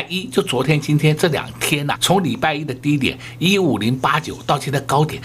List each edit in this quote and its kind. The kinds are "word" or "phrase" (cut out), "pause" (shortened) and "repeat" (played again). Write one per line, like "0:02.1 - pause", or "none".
0:02.0 - word